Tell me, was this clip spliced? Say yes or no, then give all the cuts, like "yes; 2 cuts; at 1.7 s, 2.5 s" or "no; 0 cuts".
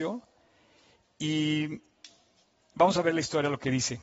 no; 0 cuts